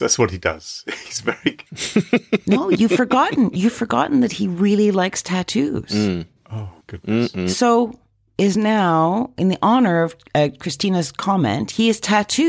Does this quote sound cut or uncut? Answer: cut